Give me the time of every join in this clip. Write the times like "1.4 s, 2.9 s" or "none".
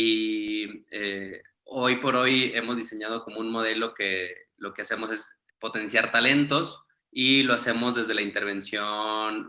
5.5 s, 7.0 s